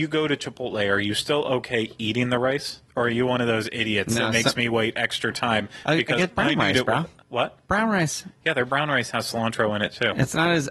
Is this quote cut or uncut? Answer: cut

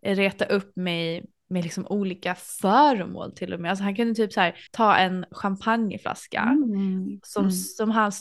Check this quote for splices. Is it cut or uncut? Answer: cut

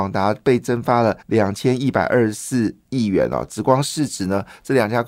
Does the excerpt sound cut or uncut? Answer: cut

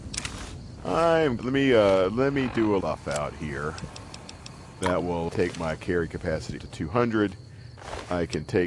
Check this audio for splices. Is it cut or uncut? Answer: cut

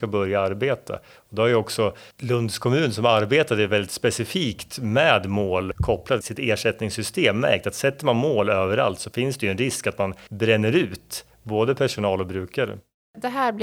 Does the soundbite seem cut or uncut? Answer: cut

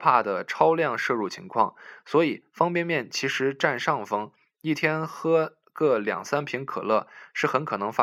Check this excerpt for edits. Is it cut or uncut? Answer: uncut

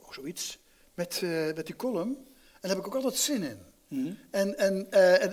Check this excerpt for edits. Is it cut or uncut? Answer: uncut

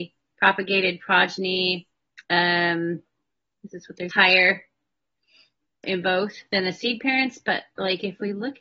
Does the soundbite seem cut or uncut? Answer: cut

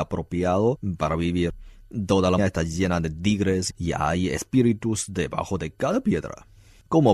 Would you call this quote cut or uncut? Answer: cut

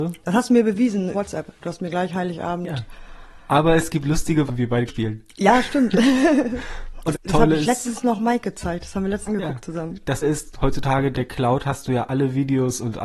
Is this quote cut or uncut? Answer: cut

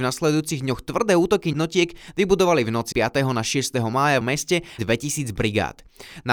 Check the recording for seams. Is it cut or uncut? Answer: cut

